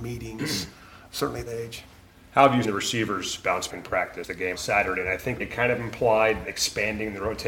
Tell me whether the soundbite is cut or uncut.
cut